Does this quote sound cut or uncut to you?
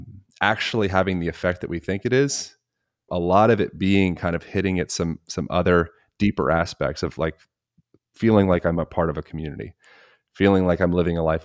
cut